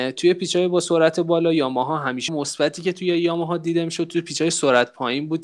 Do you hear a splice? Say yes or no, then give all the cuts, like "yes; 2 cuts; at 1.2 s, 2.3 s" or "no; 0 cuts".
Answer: yes; 1 cut; at 2.3 s